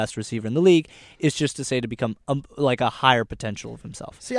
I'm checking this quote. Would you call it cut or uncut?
uncut